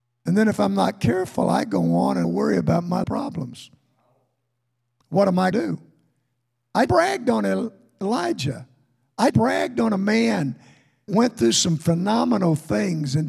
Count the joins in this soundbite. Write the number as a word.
six